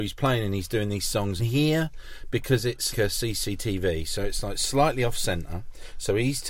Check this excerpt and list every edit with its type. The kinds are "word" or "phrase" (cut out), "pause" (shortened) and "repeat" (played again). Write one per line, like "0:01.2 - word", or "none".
0:01.4 - phrase
0:02.9 - word

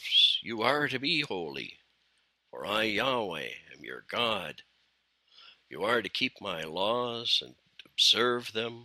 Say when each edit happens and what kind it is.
none

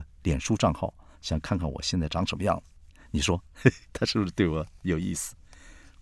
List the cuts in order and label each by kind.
none

